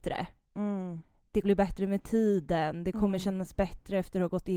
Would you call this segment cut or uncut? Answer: cut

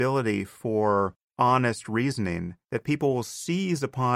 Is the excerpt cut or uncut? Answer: cut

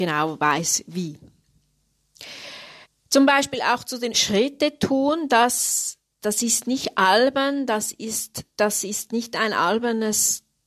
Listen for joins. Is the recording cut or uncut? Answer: cut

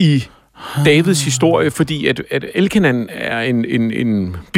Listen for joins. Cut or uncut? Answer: uncut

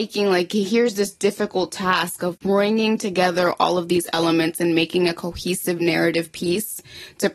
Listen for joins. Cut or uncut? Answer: uncut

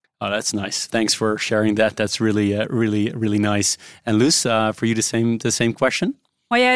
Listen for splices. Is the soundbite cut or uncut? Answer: uncut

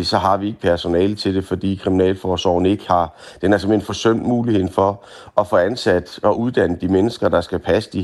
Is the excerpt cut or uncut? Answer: uncut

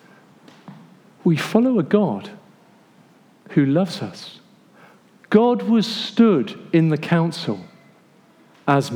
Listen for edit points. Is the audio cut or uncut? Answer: uncut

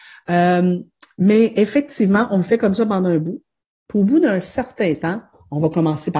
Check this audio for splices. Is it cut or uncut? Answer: uncut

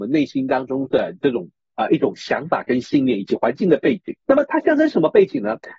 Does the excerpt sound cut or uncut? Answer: cut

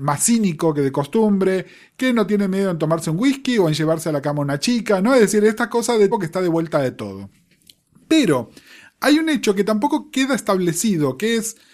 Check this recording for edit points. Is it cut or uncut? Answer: cut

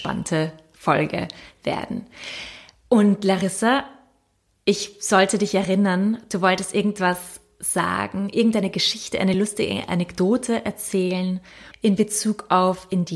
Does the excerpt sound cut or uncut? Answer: uncut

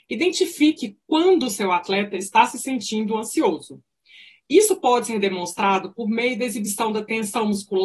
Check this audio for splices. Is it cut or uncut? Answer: uncut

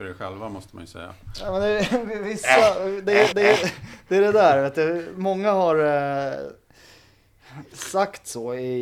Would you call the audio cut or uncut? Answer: cut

